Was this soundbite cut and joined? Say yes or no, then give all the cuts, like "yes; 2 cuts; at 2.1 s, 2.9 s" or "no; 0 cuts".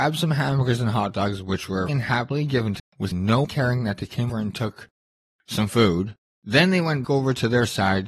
yes; 6 cuts; at 1.9 s, 2.8 s, 3.1 s, 3.4 s, 4.3 s, 7.0 s